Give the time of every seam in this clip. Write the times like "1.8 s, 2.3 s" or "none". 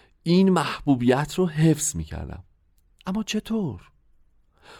none